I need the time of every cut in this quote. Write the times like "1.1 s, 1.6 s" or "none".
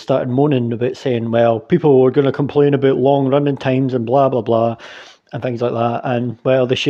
none